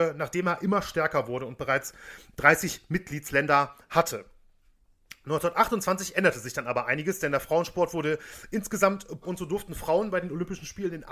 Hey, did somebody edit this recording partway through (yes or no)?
yes